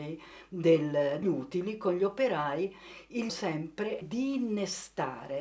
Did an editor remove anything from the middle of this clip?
yes; 3 cuts; at 1.2 s, 3.3 s, 4.0 s

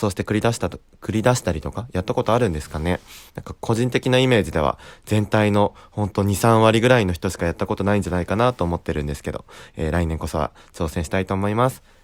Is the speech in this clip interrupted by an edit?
yes; 1 cut; at 3.3 s

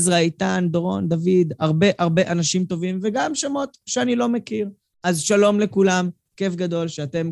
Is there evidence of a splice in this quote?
no; 0 cuts

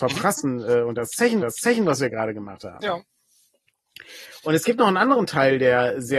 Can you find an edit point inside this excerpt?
yes; 1 cut; at 1.4 s

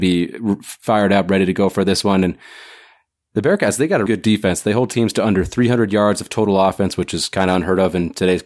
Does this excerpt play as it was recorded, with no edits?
no; 1 cut; at 4.1 s

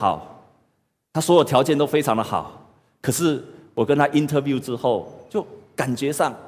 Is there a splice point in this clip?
no; 0 cuts

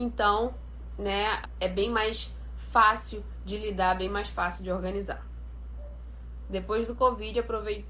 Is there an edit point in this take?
yes; 1 cut; at 1.4 s

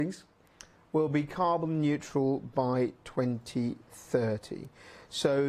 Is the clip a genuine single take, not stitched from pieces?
yes; 0 cuts

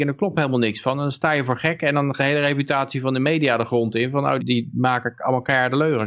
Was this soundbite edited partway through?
yes; 2 cuts; at 2.2 s, 4.4 s

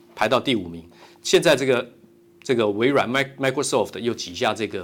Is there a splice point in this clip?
no; 0 cuts

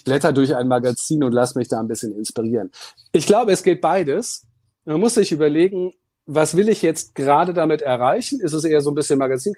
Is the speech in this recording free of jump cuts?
yes; 0 cuts

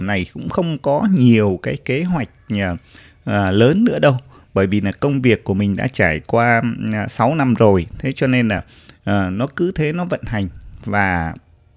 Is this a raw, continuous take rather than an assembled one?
yes; 0 cuts

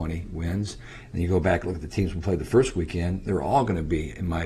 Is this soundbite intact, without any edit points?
yes; 0 cuts

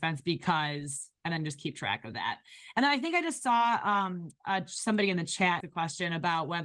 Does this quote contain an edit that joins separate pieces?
yes; 2 cuts; at 1.2 s, 5.6 s

